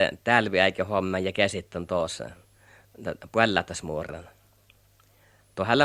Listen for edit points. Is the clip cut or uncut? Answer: uncut